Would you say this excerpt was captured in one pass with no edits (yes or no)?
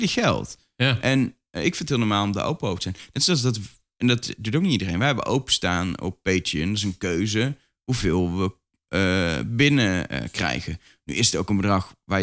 yes